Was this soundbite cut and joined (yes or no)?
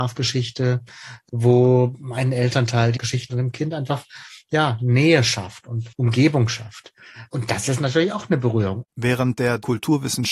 yes